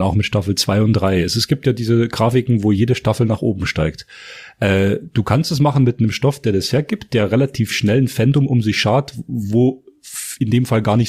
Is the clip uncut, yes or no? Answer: yes